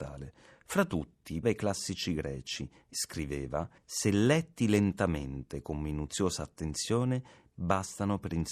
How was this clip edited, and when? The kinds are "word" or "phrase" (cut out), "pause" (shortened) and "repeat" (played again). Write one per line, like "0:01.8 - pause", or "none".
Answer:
0:01.4 - word
0:02.9 - phrase
0:03.8 - pause